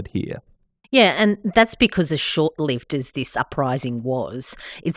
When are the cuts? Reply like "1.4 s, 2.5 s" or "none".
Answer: none